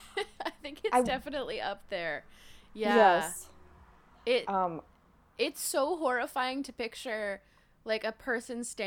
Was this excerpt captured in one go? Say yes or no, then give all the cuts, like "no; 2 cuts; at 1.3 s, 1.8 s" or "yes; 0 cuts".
yes; 0 cuts